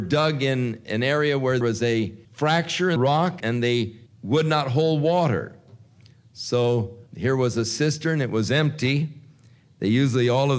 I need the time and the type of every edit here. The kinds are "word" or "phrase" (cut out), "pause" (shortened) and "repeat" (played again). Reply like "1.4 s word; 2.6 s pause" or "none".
1.6 s word; 2.2 s pause; 3.0 s word; 3.4 s word; 4.1 s pause; 7.1 s pause